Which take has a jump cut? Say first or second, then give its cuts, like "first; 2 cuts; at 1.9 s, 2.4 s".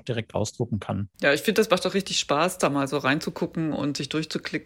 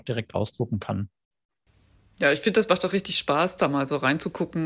first; 1 cut; at 1.1 s